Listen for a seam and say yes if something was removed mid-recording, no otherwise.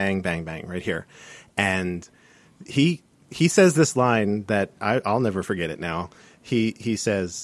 no